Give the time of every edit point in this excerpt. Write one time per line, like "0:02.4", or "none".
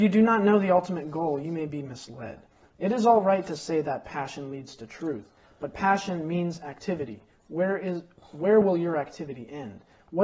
none